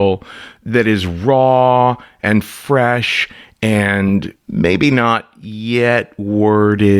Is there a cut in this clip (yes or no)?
no